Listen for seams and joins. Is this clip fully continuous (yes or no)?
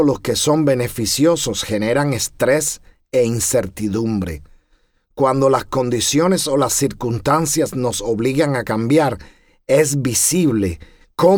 yes